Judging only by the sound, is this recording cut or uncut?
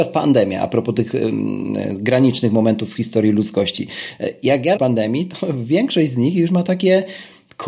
cut